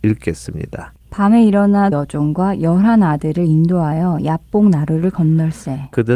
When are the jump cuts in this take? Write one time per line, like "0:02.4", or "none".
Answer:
0:01.0
0:01.9